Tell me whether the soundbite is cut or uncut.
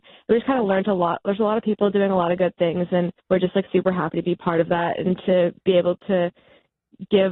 cut